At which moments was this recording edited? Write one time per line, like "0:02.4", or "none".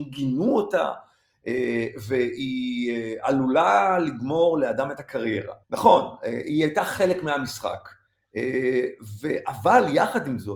0:05.6